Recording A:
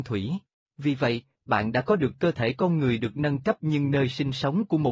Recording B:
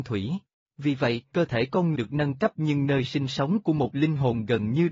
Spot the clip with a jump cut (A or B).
B